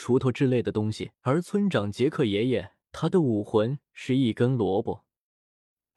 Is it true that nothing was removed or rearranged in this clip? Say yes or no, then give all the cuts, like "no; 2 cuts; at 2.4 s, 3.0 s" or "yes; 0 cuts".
no; 2 cuts; at 1.1 s, 2.8 s